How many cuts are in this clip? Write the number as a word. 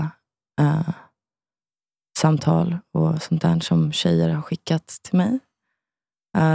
zero